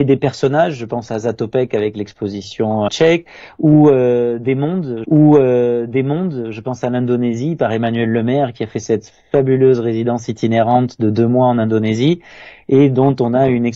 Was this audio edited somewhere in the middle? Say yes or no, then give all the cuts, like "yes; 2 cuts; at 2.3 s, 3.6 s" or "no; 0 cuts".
yes; 2 cuts; at 2.9 s, 5.0 s